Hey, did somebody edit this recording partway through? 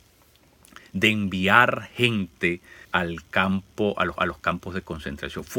yes; 2 cuts; at 2.8 s, 4.2 s

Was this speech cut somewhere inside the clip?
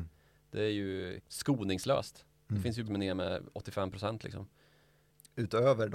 yes; 2 cuts; at 1.2 s, 2.9 s

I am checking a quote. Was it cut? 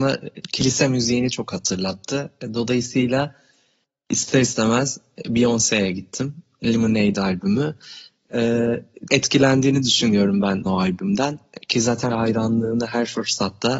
yes; 3 cuts; at 9.1 s, 10.7 s, 12.1 s

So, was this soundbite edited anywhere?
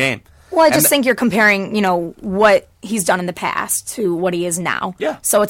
no; 0 cuts

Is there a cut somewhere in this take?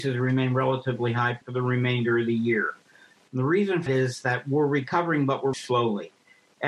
yes; 3 cuts; at 1.4 s, 3.9 s, 5.5 s

